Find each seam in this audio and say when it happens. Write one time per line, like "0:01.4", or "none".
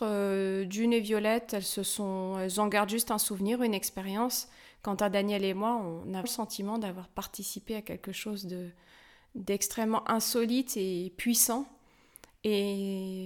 0:06.2

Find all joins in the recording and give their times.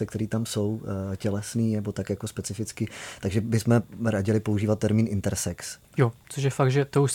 none

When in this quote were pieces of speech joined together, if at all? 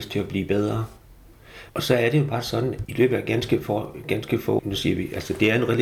0:01.7
0:02.8
0:04.6

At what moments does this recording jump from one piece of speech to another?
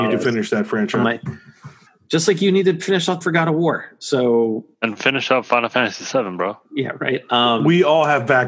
0:01.0
0:01.9
0:03.2
0:04.7
0:06.6

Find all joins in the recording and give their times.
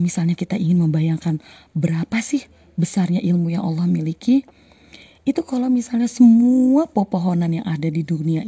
none

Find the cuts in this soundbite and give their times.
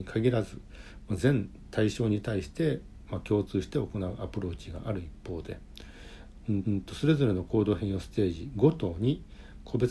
0:06.6

